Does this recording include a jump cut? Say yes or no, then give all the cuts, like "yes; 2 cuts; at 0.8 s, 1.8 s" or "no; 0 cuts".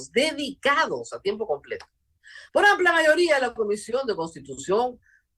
yes; 1 cut; at 2.5 s